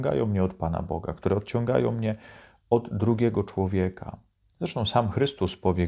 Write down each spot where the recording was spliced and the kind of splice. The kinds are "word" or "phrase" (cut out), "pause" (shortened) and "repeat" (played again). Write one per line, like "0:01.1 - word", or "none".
none